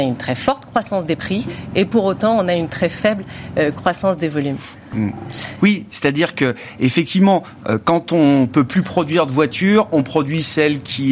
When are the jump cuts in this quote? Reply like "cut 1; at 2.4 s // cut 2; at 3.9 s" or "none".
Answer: none